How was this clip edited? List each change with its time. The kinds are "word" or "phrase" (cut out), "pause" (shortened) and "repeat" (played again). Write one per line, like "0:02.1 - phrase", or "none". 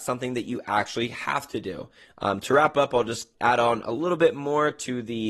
0:03.3 - word